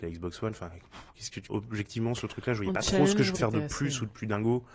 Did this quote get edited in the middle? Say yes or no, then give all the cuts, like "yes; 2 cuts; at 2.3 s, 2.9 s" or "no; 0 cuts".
yes; 4 cuts; at 1.5 s, 2.2 s, 2.8 s, 3.3 s